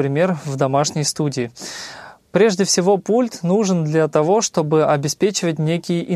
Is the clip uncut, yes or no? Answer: yes